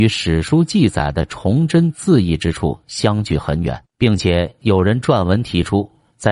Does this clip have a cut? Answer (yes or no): yes